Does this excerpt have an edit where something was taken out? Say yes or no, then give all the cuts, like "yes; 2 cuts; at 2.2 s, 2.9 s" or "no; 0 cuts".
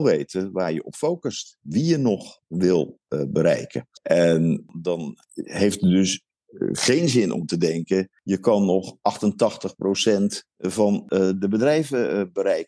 no; 0 cuts